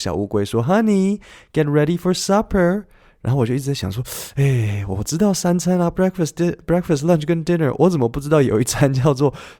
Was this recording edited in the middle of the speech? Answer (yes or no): no